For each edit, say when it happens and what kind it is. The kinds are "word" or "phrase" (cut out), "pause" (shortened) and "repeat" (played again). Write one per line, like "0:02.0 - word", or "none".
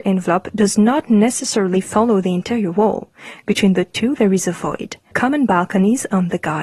0:05.1 - word